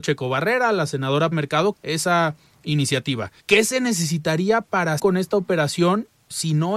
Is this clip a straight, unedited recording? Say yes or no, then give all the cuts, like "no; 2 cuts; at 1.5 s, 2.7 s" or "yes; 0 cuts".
no; 4 cuts; at 1.3 s, 1.7 s, 3.4 s, 5.0 s